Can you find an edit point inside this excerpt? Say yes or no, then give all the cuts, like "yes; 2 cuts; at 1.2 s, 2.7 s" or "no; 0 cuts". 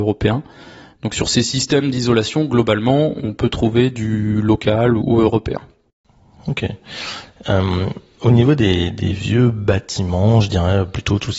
yes; 1 cut; at 5.0 s